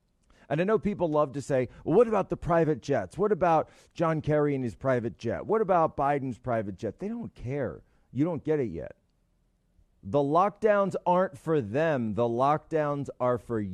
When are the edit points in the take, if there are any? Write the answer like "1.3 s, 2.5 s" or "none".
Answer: none